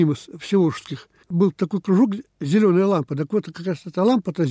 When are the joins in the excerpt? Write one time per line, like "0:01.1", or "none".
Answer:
0:01.2

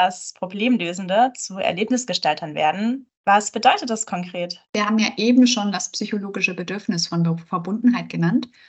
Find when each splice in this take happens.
0:03.1
0:04.6

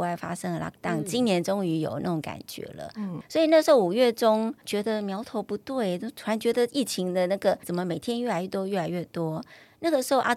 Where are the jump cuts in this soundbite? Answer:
0:03.2
0:07.6

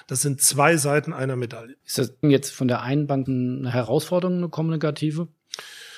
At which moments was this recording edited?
0:01.8
0:02.2
0:03.3

